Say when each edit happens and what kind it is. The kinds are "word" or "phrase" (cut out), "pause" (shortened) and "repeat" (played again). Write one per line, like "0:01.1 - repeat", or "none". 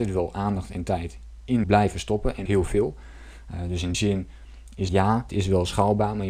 0:01.6 - word
0:02.5 - word
0:03.9 - word
0:04.9 - word
0:05.3 - word

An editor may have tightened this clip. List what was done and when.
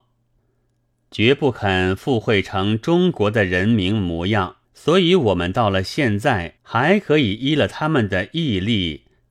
0:04.7 - pause
0:06.6 - pause

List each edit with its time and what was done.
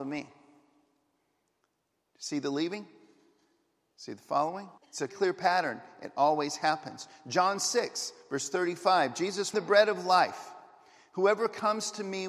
0:04.8 - pause
0:05.1 - word
0:09.5 - phrase

